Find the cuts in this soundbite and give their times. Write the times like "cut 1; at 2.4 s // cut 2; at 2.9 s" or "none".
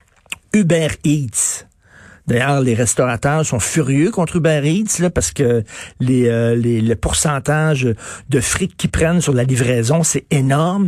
none